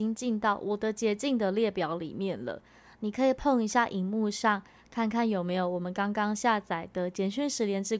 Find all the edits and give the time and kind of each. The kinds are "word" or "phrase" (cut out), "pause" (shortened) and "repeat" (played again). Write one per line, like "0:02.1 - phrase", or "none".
none